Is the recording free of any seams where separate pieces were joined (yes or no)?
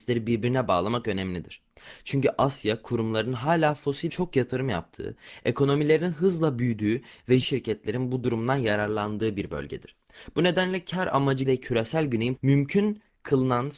no